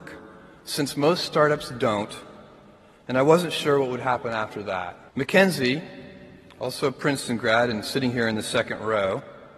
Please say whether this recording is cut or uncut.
cut